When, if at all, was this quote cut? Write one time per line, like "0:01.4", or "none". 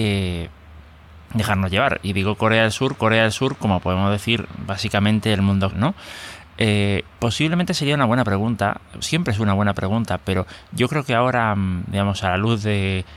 0:01.2
0:03.0
0:05.7
0:07.2
0:09.0